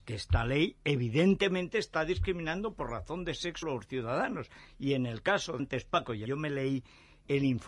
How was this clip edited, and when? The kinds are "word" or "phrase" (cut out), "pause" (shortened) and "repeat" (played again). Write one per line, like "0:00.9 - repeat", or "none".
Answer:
0:03.6 - word
0:05.6 - word
0:06.3 - word